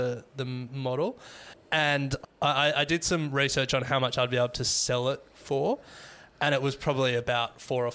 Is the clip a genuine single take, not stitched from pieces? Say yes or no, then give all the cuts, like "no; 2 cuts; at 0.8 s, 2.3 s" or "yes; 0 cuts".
yes; 0 cuts